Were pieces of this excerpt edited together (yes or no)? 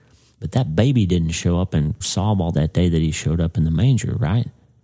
yes